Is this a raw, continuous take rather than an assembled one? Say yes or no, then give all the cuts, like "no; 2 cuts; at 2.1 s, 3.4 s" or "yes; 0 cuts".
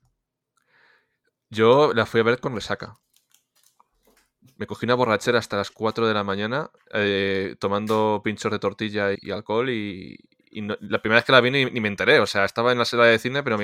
no; 2 cuts; at 6.8 s, 9.2 s